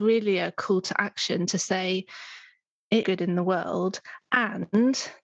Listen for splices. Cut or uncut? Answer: cut